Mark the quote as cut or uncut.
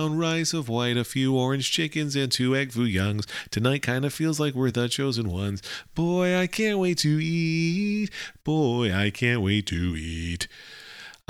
uncut